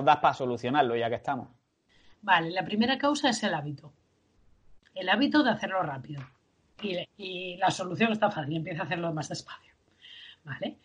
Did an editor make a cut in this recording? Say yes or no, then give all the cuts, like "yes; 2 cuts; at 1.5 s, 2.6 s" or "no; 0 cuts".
no; 0 cuts